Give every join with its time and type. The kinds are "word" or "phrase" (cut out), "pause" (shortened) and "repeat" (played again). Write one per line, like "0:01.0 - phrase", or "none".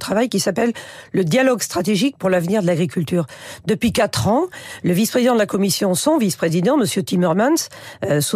none